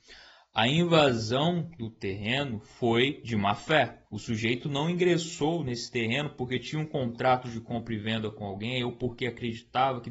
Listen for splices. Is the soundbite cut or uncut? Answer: cut